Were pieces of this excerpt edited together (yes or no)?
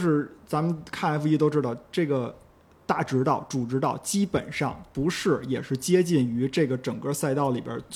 no